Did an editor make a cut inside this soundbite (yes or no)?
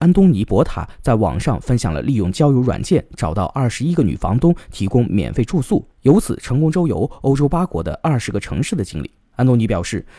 yes